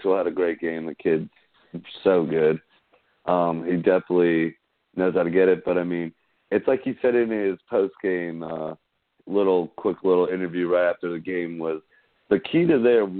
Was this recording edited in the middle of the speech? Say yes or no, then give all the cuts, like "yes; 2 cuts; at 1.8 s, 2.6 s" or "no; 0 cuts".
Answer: no; 0 cuts